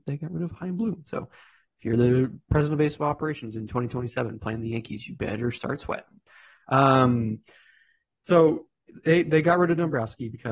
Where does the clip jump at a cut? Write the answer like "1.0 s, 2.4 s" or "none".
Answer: none

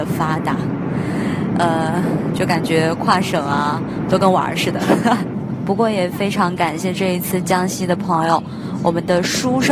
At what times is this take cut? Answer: none

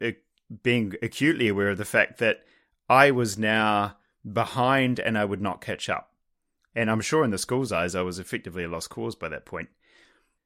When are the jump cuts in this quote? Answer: none

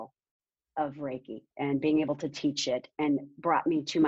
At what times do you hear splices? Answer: 1.5 s

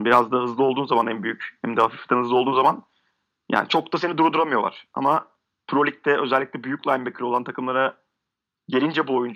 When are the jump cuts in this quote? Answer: none

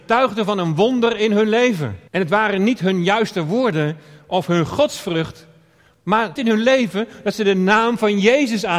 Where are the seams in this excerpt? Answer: 2.1 s, 6.4 s

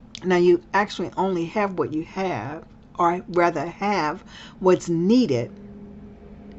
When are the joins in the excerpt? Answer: none

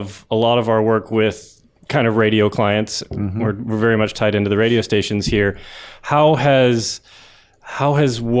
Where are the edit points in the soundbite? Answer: none

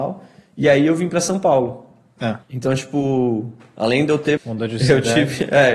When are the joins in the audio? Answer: 2.4 s, 4.4 s

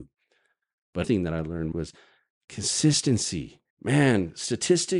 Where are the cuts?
1.0 s, 1.7 s, 3.7 s

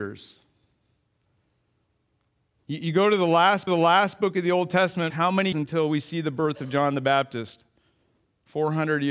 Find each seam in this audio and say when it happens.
3.7 s, 5.1 s, 5.5 s

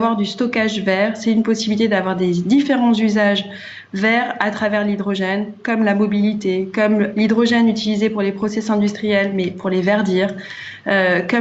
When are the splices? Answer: none

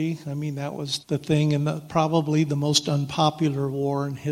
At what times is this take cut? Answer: 1.0 s

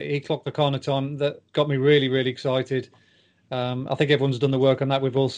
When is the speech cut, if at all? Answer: 1.5 s

